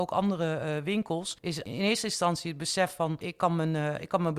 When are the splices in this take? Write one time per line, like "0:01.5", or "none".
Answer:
0:03.2